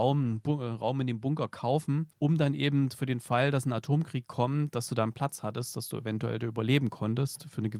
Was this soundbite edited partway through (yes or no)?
yes